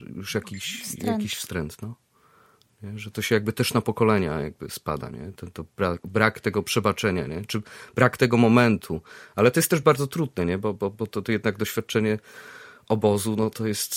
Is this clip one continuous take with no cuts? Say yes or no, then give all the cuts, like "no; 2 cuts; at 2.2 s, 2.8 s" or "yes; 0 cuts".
yes; 0 cuts